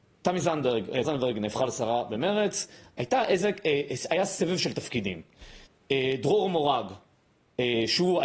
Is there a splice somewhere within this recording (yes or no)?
yes